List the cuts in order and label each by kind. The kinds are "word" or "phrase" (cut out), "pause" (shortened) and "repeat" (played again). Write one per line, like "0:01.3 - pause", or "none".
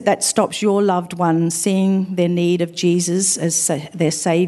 none